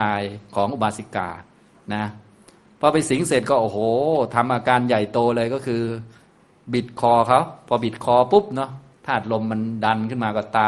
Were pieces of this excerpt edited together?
no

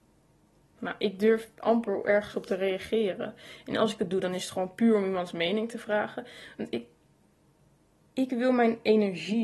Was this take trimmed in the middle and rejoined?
no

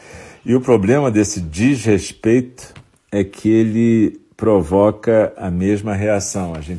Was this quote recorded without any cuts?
yes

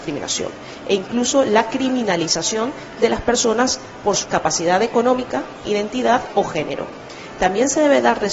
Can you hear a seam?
yes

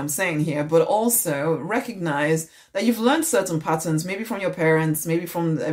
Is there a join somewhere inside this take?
no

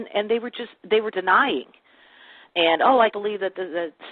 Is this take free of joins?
no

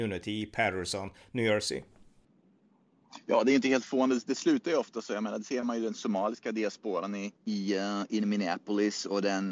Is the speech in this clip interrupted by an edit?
yes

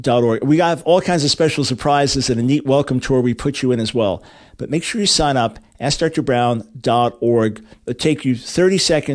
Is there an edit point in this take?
no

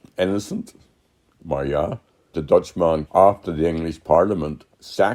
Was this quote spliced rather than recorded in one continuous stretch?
yes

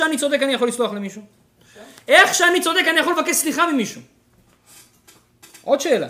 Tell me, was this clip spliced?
no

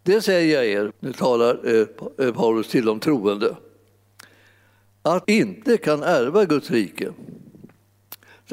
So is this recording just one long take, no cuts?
no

